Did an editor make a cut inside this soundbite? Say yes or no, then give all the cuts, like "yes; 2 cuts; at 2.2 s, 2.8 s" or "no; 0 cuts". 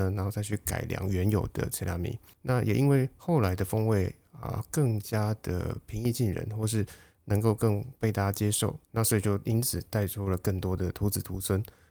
no; 0 cuts